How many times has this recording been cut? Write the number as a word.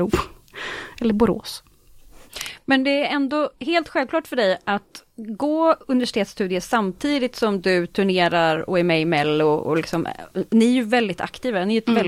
one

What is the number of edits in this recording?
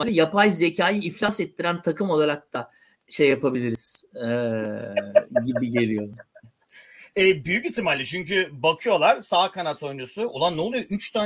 zero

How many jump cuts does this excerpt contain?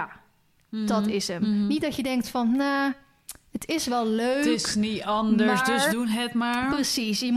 one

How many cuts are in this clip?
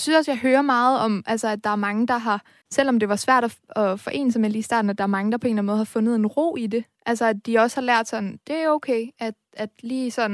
one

